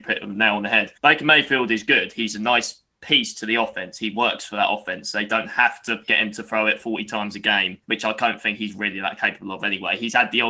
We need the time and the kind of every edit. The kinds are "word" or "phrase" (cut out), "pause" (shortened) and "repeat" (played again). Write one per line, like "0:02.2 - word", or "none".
0:01.0 - pause
0:07.8 - pause